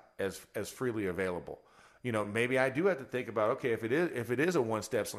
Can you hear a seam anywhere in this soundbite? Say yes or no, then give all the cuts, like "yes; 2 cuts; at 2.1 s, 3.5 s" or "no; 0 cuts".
no; 0 cuts